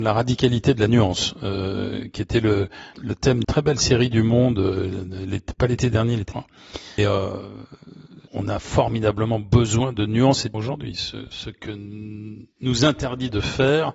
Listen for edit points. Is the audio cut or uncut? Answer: cut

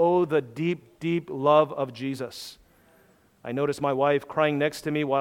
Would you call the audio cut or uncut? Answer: uncut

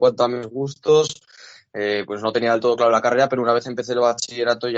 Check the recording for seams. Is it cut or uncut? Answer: uncut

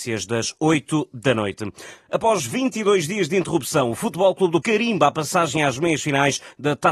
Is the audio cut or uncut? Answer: cut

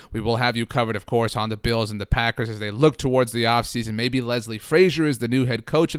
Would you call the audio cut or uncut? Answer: uncut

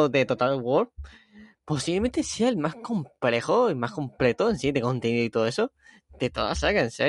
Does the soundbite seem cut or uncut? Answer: uncut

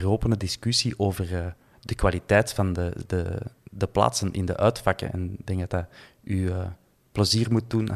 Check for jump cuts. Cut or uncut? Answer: uncut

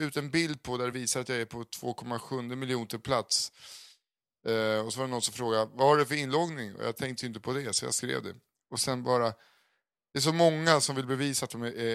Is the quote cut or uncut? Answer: uncut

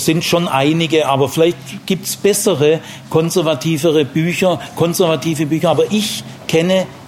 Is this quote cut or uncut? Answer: uncut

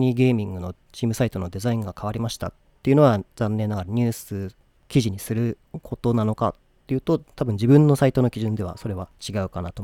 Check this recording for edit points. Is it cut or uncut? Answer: uncut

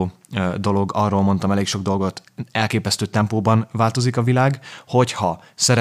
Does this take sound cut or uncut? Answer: uncut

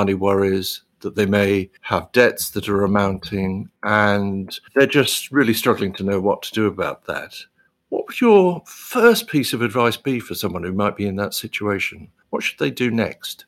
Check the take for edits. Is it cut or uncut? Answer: cut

